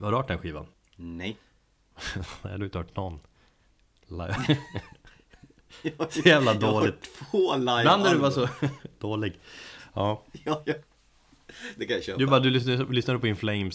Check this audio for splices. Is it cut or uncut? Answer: uncut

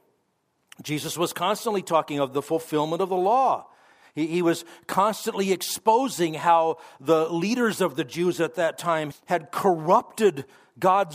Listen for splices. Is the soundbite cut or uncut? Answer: cut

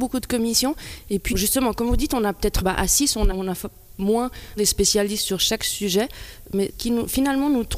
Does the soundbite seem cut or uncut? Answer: cut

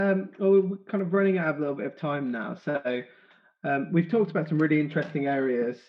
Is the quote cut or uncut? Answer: uncut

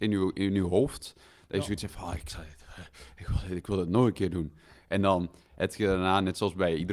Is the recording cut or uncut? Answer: uncut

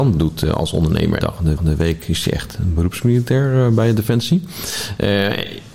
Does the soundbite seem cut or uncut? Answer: cut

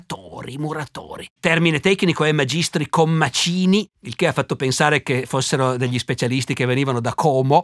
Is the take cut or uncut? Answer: cut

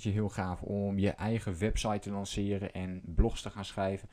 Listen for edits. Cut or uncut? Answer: uncut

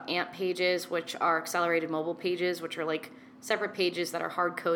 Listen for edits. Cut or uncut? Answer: uncut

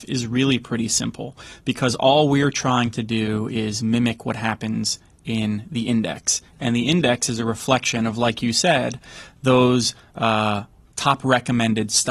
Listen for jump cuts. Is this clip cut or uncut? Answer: uncut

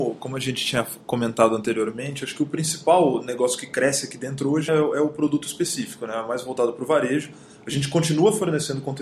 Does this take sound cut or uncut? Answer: cut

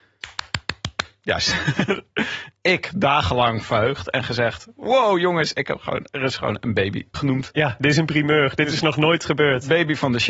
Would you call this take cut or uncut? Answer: cut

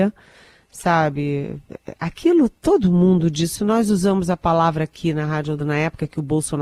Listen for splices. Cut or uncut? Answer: cut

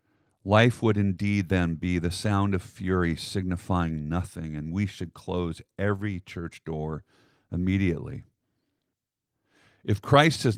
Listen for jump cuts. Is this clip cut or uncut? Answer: uncut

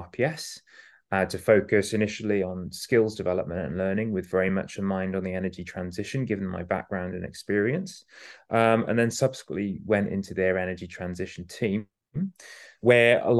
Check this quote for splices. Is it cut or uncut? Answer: uncut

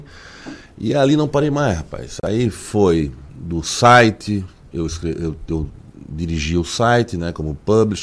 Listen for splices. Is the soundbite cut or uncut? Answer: uncut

